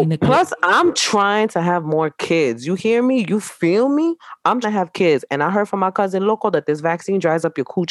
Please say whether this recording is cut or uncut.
cut